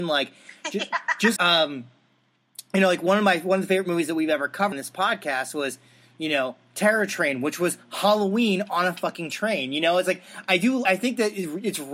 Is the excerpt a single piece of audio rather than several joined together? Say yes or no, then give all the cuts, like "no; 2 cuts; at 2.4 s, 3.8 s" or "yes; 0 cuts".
no; 3 cuts; at 1.4 s, 4.7 s, 10.8 s